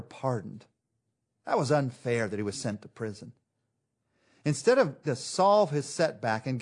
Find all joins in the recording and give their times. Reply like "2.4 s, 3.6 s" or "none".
5.0 s